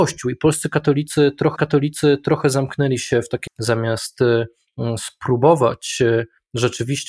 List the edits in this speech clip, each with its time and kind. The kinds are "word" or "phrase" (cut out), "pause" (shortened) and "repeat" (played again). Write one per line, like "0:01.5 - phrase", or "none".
0:01.6 - repeat
0:03.5 - phrase